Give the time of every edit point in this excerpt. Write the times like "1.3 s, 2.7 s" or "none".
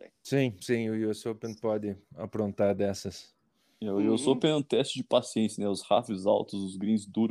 none